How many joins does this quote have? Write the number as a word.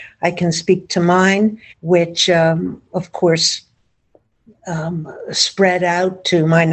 one